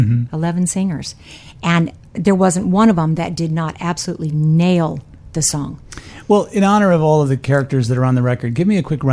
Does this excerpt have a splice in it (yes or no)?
no